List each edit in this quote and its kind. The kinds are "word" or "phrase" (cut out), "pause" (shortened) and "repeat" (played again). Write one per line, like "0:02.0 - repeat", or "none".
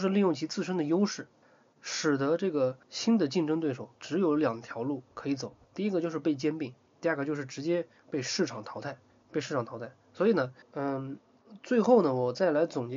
0:01.4 - pause
0:02.8 - pause
0:04.0 - pause
0:05.1 - pause
0:05.6 - pause
0:06.9 - pause
0:09.1 - pause
0:10.6 - pause